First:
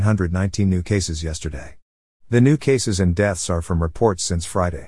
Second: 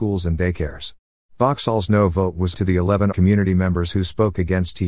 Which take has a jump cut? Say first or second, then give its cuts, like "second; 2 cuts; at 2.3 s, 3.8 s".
second; 2 cuts; at 2.5 s, 3.1 s